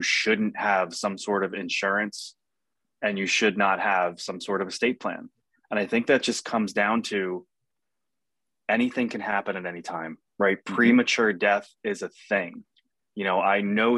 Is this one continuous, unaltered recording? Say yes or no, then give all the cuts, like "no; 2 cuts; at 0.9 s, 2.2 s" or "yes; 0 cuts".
yes; 0 cuts